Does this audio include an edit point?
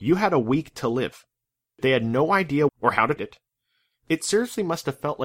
yes; 3 cuts; at 1.4 s, 2.7 s, 3.2 s

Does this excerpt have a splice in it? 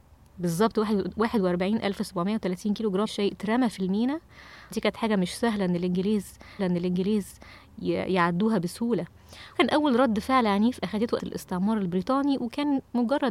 yes; 5 cuts; at 3.1 s, 4.7 s, 6.6 s, 9.5 s, 11.2 s

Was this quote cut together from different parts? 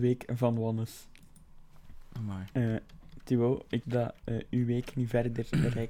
yes; 1 cut; at 3.8 s

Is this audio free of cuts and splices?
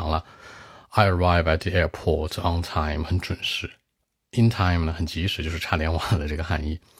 yes; 0 cuts

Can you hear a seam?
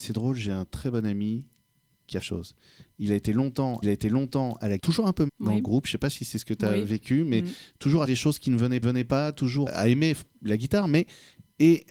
yes; 7 cuts; at 2.2 s, 3.8 s, 4.8 s, 5.3 s, 8.1 s, 8.8 s, 9.7 s

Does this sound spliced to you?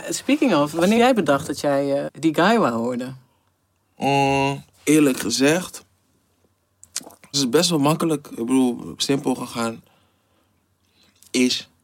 yes; 4 cuts; at 1.0 s, 2.1 s, 4.7 s, 7.3 s

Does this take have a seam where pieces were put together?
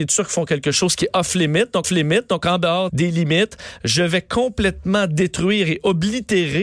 yes; 2 cuts; at 1.8 s, 2.9 s

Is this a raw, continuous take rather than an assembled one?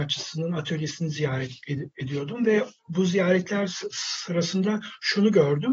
no; 1 cut; at 2.8 s

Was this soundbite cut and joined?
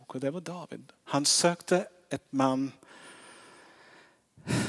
no; 0 cuts

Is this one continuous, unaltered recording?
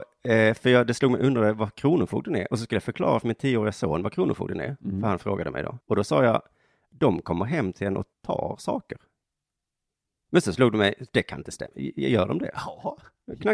no; 2 cuts; at 5.8 s, 8.1 s

